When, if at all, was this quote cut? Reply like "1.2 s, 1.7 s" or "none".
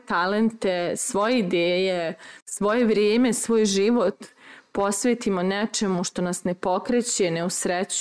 2.4 s